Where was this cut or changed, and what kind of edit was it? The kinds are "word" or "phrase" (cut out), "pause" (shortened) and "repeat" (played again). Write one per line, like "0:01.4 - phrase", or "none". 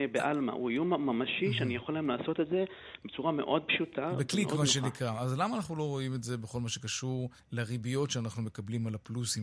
0:07.4 - pause